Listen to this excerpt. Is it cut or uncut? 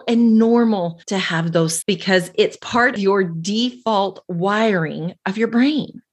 cut